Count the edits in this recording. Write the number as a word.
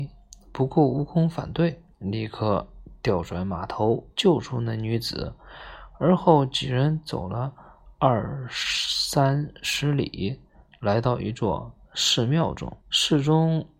three